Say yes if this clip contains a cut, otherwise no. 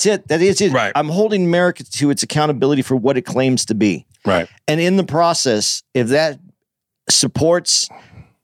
no